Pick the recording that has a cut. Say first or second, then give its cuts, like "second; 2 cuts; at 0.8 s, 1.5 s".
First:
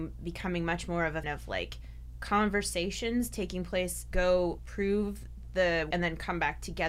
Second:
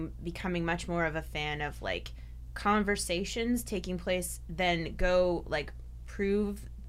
first; 4 cuts; at 1.2 s, 4.1 s, 4.6 s, 5.9 s